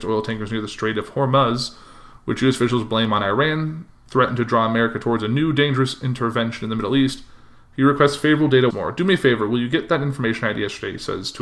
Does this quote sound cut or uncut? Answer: cut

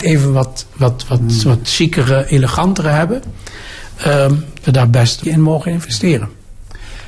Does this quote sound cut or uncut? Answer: cut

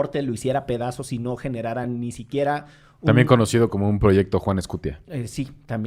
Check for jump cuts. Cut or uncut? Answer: uncut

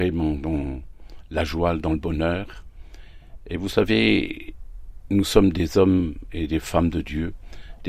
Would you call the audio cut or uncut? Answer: uncut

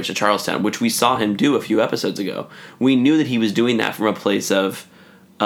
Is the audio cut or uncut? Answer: uncut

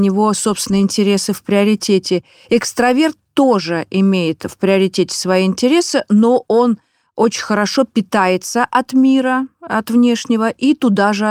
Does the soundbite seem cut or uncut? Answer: uncut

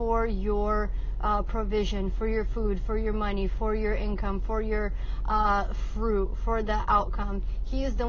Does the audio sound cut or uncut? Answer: uncut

